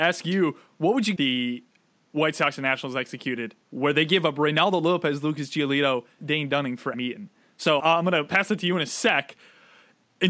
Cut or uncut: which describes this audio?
cut